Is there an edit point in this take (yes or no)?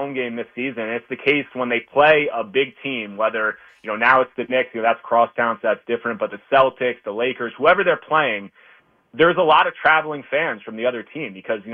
no